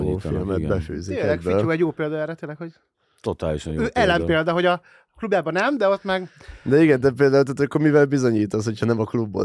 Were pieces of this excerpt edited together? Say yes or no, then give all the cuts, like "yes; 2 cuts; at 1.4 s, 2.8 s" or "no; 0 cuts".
no; 0 cuts